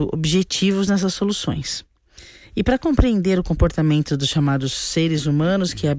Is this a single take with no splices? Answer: yes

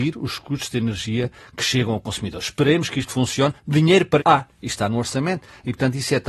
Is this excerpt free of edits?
no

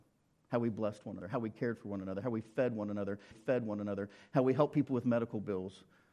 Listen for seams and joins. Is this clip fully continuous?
no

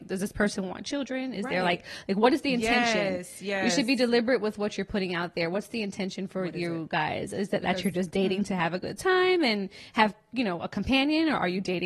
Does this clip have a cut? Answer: no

